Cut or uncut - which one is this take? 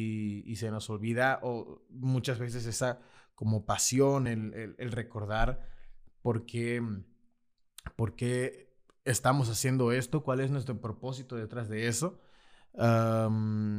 uncut